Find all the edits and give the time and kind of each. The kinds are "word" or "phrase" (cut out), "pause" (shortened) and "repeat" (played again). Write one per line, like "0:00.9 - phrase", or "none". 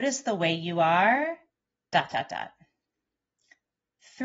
none